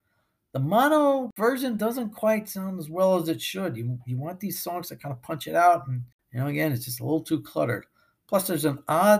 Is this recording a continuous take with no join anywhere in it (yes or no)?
yes